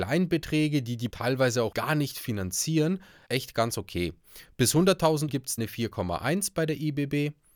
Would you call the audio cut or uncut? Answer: cut